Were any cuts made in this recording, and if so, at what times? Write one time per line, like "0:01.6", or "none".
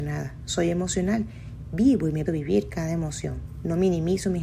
0:02.3